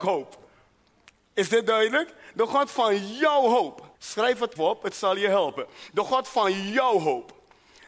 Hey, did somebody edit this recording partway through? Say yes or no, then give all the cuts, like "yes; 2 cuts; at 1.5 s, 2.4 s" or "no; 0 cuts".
yes; 2 cuts; at 3.9 s, 4.6 s